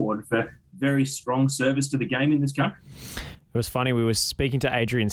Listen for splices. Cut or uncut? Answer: uncut